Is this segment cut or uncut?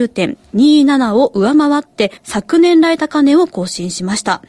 cut